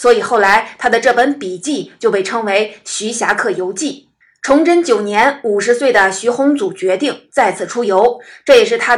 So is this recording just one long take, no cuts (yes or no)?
no